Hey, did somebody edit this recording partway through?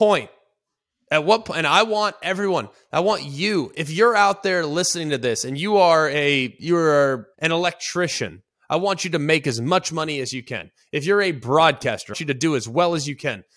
yes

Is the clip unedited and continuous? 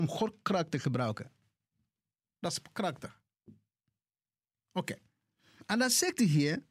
yes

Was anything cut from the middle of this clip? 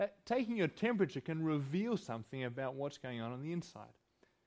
no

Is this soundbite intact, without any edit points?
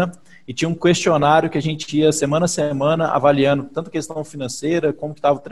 yes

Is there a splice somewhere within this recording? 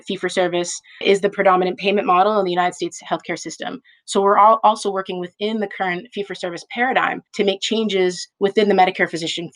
yes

